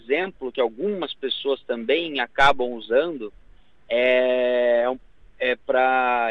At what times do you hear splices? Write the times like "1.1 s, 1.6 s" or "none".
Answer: none